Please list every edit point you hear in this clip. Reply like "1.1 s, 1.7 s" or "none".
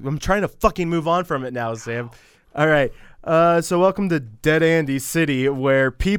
none